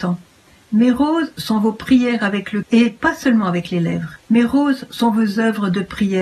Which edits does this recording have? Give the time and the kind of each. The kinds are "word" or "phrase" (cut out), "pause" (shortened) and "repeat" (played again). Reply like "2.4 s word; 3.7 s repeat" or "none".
2.6 s word; 4.2 s pause